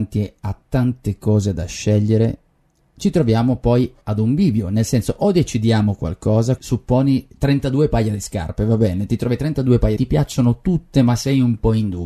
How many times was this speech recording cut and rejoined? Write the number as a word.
three